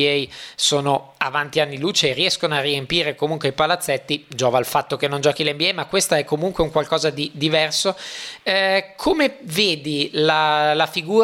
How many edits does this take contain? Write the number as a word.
zero